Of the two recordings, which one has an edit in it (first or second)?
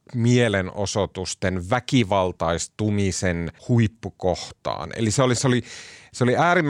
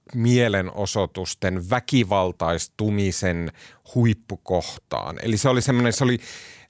first